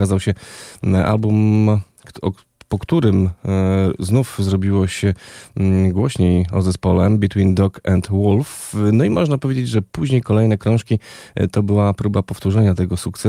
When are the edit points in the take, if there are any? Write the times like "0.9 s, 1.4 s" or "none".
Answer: none